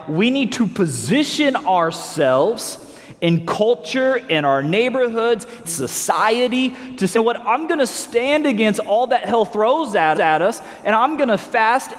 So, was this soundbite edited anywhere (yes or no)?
yes